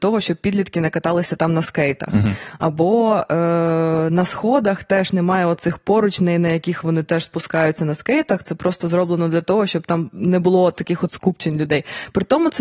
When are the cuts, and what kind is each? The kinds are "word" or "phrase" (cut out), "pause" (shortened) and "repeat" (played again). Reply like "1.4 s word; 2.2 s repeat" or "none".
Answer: none